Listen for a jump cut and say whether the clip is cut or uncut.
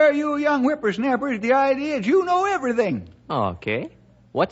cut